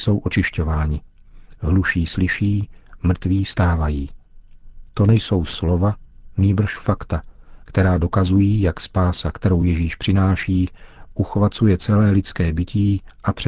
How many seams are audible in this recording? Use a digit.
0